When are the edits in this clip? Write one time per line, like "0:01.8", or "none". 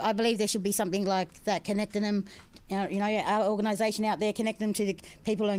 none